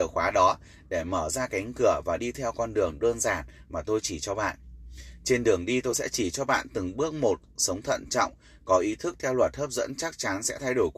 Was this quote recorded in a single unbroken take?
yes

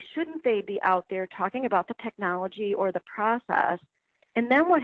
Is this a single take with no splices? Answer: yes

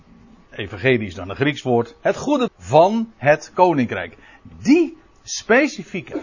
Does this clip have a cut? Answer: yes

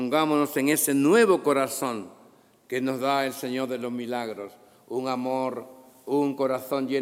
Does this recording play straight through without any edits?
yes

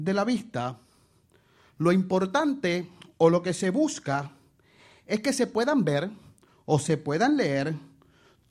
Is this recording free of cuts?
yes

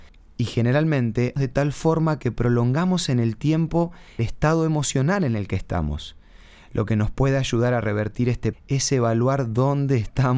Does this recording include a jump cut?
yes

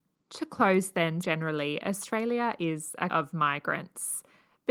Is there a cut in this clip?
yes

